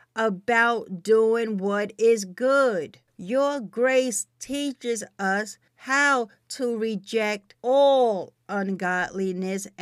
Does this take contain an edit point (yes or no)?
yes